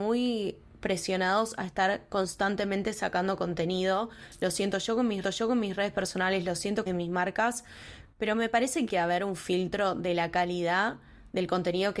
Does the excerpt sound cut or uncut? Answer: cut